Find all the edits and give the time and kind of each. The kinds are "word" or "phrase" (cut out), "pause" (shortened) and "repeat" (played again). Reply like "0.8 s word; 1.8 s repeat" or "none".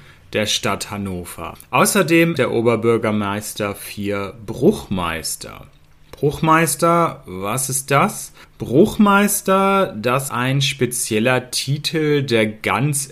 2.4 s word; 10.3 s word